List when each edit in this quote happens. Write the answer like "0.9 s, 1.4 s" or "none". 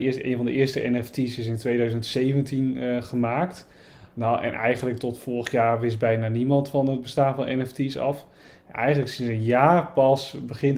none